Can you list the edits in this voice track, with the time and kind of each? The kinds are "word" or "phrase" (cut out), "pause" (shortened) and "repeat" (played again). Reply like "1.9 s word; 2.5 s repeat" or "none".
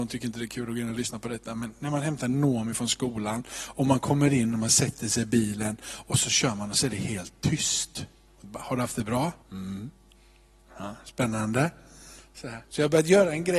9.4 s pause; 12.6 s pause